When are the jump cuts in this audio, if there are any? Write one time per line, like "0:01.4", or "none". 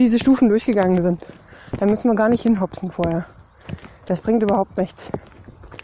none